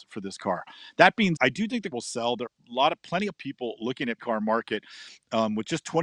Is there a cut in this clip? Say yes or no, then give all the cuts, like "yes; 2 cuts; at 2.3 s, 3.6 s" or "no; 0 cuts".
yes; 5 cuts; at 1.4 s, 1.9 s, 2.5 s, 3.4 s, 4.2 s